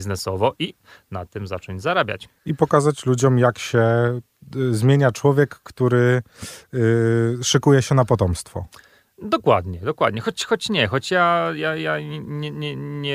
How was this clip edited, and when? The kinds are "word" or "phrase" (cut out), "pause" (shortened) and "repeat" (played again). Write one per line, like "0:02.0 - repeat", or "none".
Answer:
0:02.4 - pause